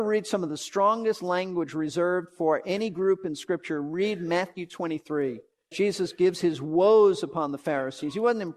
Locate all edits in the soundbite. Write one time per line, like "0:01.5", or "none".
0:05.7